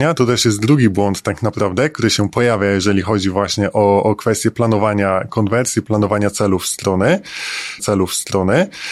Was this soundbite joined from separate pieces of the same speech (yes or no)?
yes